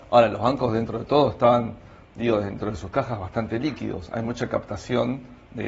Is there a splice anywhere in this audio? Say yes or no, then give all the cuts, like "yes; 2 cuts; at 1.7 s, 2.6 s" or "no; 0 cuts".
no; 0 cuts